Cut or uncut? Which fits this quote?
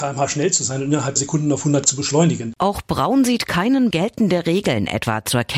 cut